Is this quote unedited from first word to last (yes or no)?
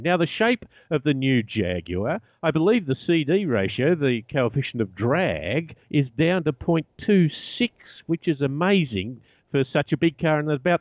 no